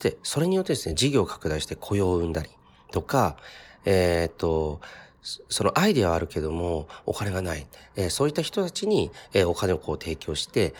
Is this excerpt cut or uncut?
uncut